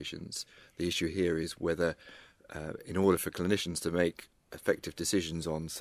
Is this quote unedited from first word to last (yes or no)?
yes